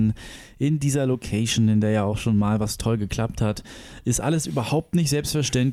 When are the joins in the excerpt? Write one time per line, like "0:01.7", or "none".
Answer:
none